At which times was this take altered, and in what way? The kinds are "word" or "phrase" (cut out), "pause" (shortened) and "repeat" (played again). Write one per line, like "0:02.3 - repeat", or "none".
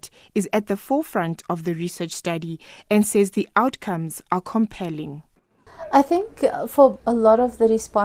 none